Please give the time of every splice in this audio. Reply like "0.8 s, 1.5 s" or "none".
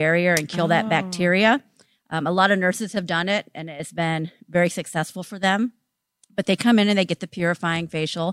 none